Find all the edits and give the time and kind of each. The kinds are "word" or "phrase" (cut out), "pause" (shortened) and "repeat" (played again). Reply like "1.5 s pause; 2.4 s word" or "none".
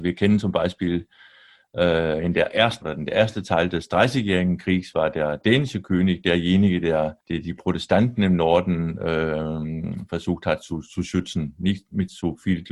2.8 s phrase; 7.2 s pause